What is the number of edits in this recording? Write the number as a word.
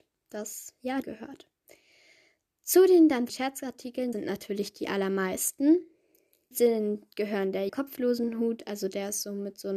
five